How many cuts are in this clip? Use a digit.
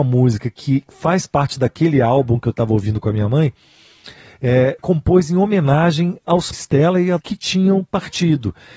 3